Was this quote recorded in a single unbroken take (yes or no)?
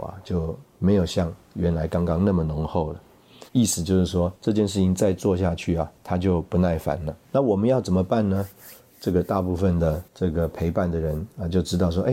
no